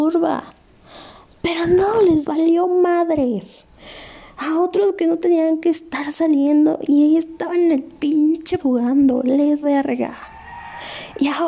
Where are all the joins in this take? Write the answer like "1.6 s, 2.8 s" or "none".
8.6 s, 9.6 s